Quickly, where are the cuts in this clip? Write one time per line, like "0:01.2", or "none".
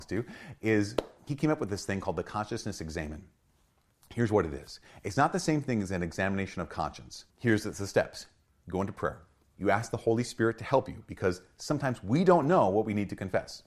none